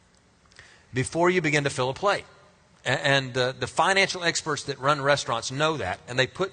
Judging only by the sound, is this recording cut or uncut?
uncut